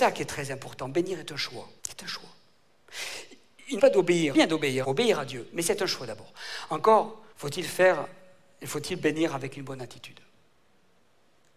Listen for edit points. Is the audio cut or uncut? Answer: cut